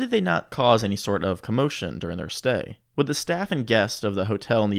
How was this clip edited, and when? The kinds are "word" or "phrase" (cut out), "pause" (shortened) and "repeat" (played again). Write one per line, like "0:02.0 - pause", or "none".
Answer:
0:02.9 - pause